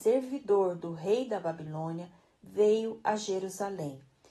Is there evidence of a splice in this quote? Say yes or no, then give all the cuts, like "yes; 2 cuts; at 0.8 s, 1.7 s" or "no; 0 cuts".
no; 0 cuts